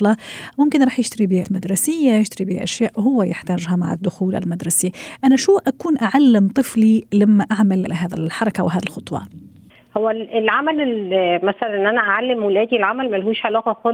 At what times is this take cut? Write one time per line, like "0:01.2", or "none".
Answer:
0:01.4
0:07.9
0:09.7